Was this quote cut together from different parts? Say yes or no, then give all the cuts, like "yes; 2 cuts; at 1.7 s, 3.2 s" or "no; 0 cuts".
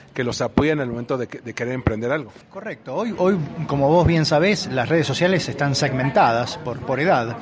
yes; 1 cut; at 2.4 s